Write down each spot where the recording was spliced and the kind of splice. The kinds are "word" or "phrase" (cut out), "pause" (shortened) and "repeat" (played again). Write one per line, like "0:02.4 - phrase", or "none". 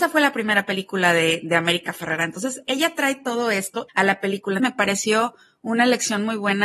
none